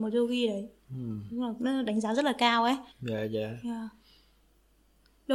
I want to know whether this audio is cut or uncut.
cut